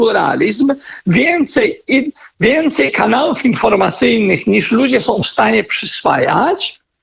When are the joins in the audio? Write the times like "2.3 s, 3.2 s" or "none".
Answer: none